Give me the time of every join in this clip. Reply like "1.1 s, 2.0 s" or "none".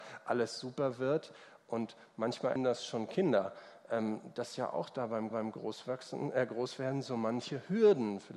2.6 s, 5.3 s